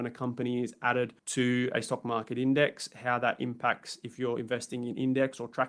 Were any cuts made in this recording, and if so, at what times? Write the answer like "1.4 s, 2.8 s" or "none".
1.2 s